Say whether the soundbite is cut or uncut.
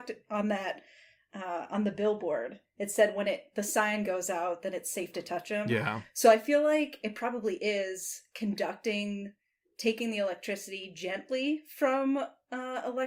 uncut